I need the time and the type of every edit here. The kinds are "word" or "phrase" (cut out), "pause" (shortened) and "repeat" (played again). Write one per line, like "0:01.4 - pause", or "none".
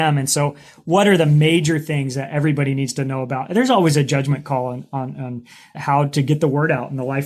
0:05.7 - phrase